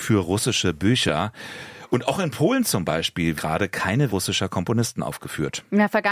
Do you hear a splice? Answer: yes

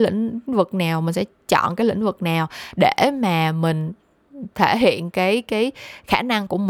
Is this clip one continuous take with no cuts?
yes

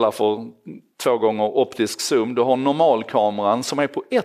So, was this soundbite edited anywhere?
no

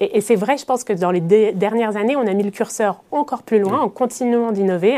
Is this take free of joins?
yes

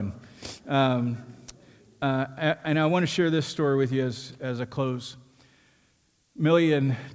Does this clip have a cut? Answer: no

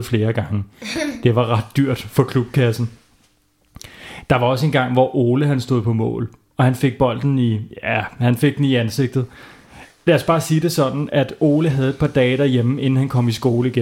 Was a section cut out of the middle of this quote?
no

